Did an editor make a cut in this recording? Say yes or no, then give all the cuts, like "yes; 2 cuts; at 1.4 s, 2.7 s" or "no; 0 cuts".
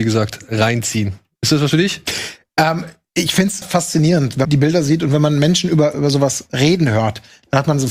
yes; 3 cuts; at 3.6 s, 4.4 s, 5.9 s